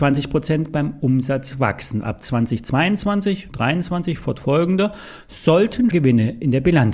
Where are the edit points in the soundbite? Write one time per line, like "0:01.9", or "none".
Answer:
0:03.5
0:05.9

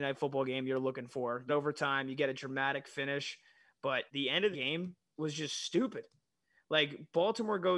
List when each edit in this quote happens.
0:01.5
0:04.1
0:04.5
0:05.2

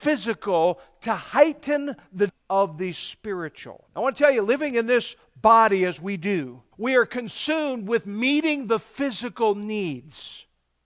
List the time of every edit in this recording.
0:02.3
0:03.9
0:06.7

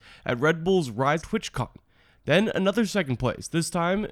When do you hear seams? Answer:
0:01.2

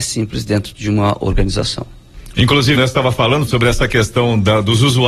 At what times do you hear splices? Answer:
0:02.7
0:03.5

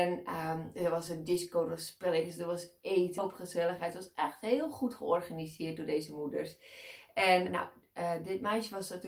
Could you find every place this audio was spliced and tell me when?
0:03.2
0:07.5

